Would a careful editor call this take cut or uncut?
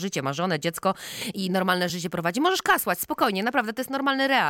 uncut